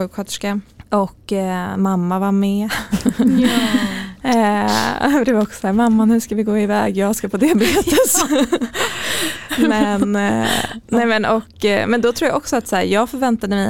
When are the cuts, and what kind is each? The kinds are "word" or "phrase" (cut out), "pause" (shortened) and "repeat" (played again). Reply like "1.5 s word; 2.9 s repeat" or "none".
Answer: none